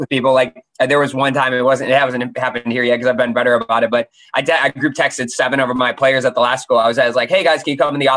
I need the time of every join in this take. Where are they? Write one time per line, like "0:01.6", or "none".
none